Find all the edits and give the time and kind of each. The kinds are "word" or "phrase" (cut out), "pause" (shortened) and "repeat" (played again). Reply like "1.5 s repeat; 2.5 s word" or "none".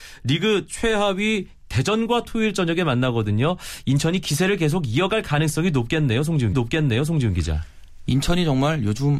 6.5 s repeat